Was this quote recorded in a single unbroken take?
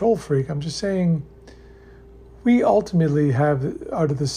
yes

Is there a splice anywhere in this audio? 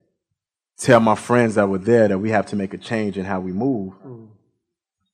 no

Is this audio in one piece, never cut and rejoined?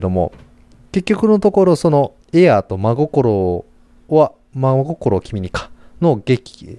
no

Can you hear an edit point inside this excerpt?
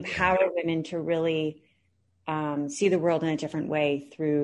no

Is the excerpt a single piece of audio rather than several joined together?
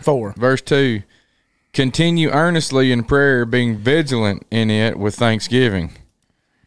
yes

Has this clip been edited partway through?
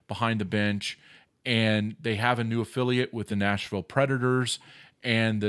no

